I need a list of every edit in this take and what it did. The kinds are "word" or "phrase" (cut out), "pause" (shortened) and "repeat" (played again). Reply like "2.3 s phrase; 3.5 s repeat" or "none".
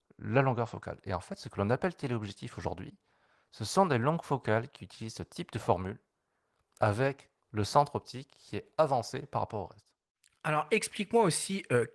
7.4 s pause